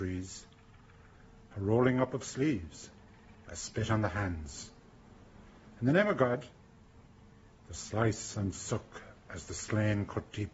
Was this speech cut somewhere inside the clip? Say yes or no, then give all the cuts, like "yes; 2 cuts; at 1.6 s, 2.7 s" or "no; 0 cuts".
no; 0 cuts